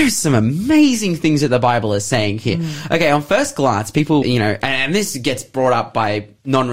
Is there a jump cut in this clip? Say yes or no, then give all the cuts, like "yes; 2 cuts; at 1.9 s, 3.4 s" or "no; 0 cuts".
yes; 1 cut; at 4.2 s